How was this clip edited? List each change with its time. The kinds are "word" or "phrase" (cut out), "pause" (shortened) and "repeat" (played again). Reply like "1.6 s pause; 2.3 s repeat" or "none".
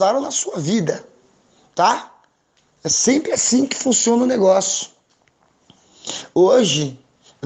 none